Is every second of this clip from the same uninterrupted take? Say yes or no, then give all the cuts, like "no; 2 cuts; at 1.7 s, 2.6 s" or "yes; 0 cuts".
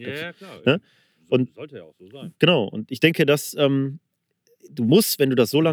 yes; 0 cuts